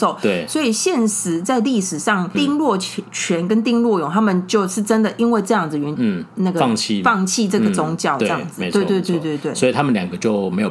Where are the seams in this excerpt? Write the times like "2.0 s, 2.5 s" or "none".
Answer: 2.3 s, 6.0 s